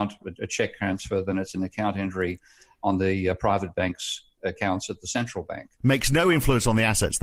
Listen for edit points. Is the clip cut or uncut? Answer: uncut